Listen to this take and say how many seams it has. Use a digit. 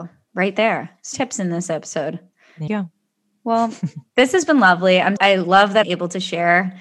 4